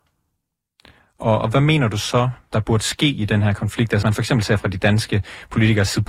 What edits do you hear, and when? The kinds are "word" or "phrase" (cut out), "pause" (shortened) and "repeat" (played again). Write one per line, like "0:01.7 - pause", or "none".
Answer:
0:04.0 - word